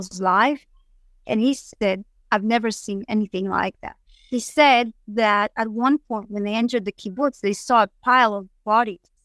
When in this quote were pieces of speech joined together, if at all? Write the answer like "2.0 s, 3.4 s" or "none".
4.1 s